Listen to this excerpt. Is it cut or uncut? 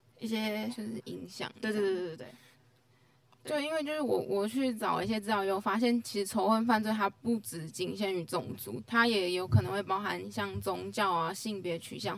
uncut